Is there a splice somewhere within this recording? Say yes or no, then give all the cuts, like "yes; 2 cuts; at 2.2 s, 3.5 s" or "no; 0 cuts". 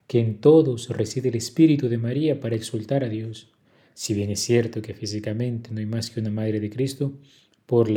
no; 0 cuts